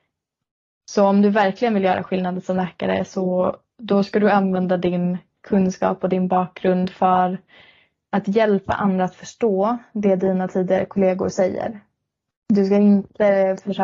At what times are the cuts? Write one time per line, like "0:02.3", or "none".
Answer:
none

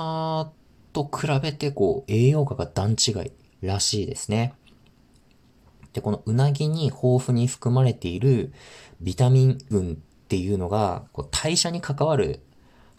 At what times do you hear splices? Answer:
0:03.5
0:09.7
0:11.1

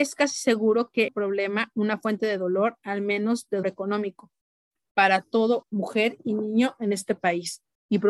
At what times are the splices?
0:01.1
0:01.7
0:03.6
0:05.6

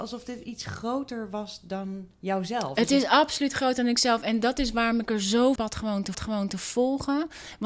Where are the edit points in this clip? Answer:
0:02.1
0:05.6
0:06.1

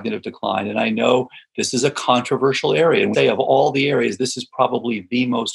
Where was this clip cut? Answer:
0:03.1

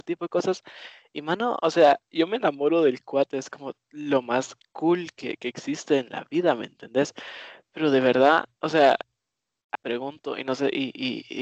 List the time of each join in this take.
0:08.6
0:09.7

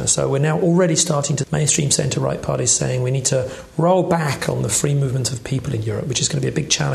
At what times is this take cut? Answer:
0:01.4

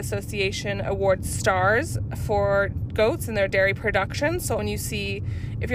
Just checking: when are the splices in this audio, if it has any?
0:04.6

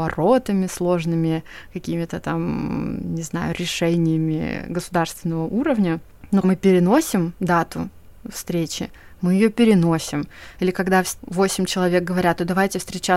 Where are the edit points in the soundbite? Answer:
0:06.4
0:08.2
0:11.2

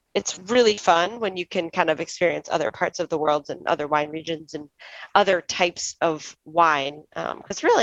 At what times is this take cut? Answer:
none

